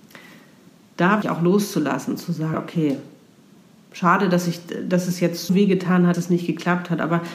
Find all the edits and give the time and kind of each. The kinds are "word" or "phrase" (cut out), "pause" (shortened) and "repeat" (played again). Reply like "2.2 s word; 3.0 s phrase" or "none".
1.2 s word; 2.5 s word; 5.5 s word; 6.1 s word